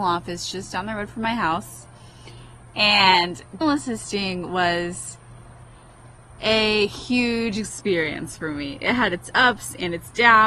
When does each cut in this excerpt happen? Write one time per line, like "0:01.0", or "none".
0:03.6